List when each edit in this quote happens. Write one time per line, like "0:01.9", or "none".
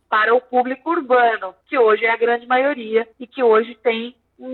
0:01.6
0:03.1